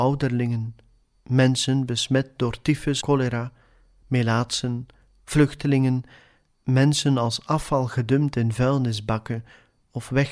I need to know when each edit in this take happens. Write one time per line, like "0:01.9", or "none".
0:03.0